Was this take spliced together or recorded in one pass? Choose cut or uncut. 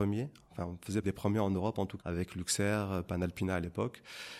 cut